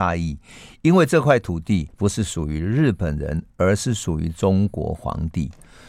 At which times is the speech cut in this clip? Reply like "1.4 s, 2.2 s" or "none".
1.9 s